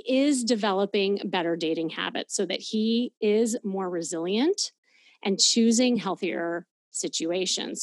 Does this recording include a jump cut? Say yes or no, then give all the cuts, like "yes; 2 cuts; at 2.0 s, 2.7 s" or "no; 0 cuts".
no; 0 cuts